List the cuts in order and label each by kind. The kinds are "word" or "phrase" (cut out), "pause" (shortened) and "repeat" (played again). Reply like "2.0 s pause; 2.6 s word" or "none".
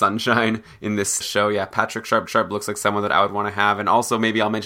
1.2 s phrase; 2.3 s repeat